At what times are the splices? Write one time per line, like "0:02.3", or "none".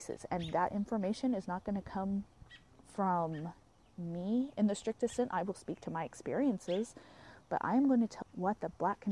0:08.2